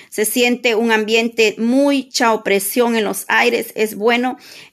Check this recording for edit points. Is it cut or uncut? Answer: uncut